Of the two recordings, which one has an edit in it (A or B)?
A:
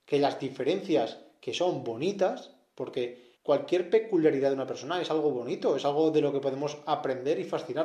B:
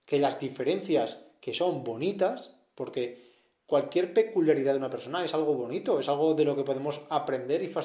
A